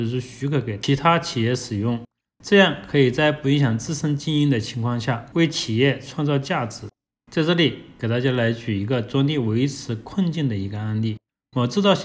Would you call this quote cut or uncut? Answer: uncut